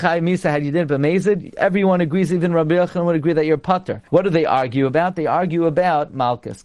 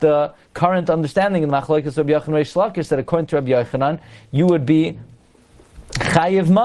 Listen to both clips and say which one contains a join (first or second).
first